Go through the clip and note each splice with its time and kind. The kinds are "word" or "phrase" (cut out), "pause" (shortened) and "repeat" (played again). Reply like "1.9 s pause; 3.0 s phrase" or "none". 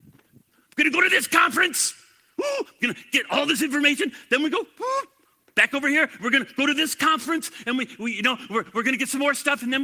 none